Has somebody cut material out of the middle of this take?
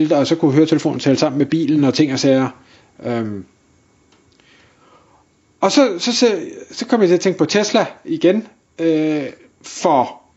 no; 0 cuts

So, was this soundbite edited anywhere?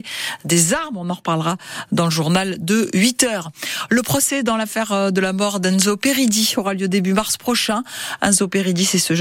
no; 0 cuts

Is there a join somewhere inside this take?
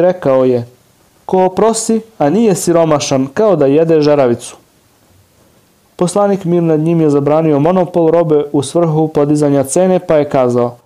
no; 0 cuts

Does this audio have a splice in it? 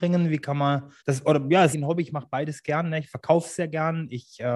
yes; 2 cuts; at 1.0 s, 1.7 s

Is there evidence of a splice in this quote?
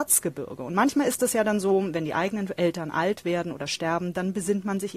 no; 0 cuts

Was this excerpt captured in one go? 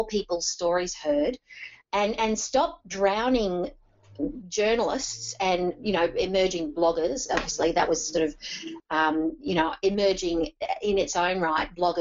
yes; 0 cuts

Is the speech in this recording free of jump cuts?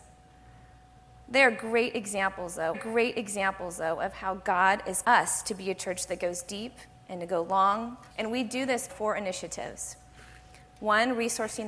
no; 4 cuts; at 2.7 s, 5.0 s, 8.1 s, 8.9 s

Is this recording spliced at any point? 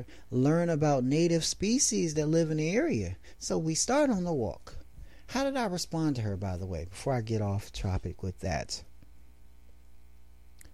no; 0 cuts

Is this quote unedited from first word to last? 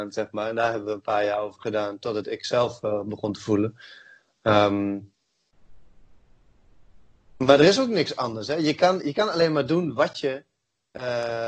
yes; 0 cuts

